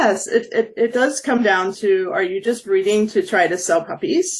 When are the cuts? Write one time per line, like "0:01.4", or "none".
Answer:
none